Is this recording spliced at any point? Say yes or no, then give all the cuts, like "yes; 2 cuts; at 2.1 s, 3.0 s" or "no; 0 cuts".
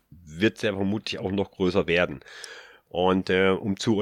no; 0 cuts